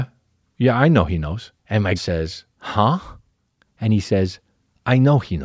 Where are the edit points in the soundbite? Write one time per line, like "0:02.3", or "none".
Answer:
0:01.6
0:02.0
0:02.5